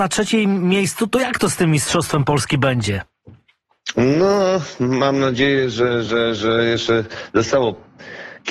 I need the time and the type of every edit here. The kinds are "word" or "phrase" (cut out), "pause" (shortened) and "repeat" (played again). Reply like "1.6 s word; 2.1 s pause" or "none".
none